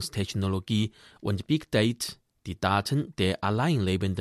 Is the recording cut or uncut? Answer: uncut